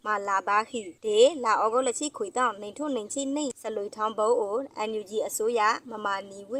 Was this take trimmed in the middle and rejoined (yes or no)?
no